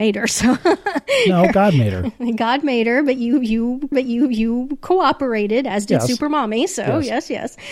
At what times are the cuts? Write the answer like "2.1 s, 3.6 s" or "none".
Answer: 3.9 s